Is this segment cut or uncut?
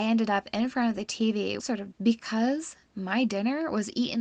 cut